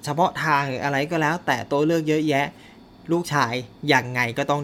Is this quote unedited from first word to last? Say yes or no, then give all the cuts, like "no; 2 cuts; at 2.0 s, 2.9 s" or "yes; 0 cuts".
yes; 0 cuts